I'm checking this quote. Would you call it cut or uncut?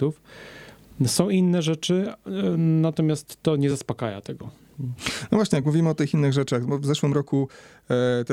uncut